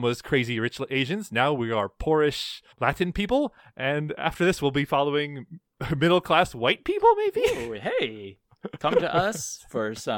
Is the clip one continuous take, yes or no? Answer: no